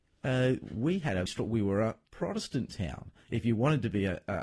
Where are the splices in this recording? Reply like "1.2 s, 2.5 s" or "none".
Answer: 1.3 s